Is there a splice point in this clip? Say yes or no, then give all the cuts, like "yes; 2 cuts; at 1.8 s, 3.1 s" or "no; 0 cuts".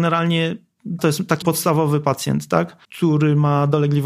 yes; 3 cuts; at 1.0 s, 1.4 s, 2.8 s